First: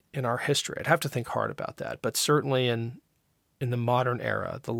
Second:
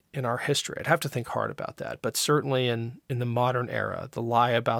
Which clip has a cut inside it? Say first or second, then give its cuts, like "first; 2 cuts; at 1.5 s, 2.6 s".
second; 1 cut; at 3.0 s